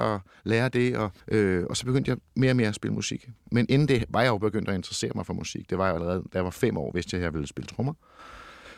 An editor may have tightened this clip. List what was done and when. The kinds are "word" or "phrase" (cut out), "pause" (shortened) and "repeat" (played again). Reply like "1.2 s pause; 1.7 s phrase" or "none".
1.2 s pause